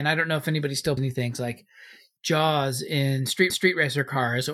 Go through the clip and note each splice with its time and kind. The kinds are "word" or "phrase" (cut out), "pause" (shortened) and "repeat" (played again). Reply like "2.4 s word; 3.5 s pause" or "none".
1.0 s word; 2.2 s word; 3.5 s repeat

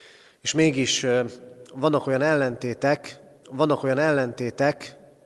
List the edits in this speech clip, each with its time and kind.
3.4 s repeat

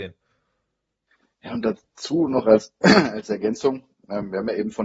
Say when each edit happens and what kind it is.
none

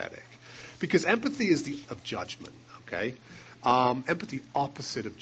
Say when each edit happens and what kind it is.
1.8 s word; 4.3 s word

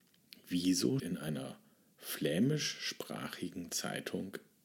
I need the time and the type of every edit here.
1.0 s word

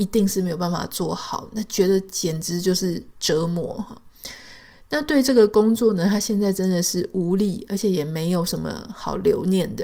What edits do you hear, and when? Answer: none

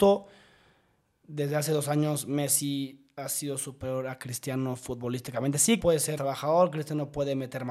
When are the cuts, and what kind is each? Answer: 5.8 s word; 6.2 s word

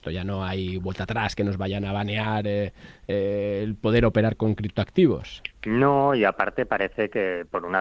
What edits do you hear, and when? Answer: 5.6 s pause

